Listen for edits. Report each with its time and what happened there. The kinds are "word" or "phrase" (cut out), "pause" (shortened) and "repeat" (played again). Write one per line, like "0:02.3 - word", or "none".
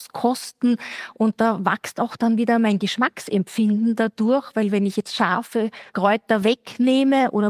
none